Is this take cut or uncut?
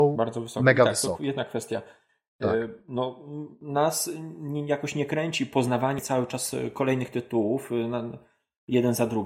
uncut